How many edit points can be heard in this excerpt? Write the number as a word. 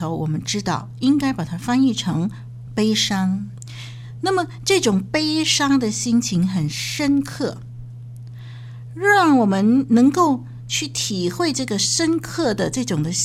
one